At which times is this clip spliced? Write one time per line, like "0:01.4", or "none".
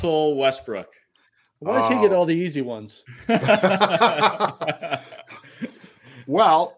none